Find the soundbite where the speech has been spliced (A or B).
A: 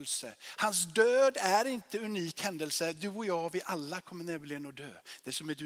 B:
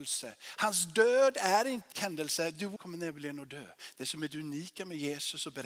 B